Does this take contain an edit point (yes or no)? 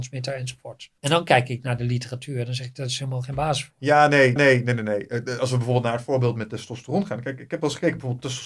yes